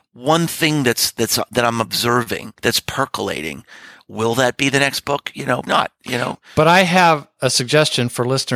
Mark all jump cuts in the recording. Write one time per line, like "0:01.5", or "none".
0:02.6
0:05.7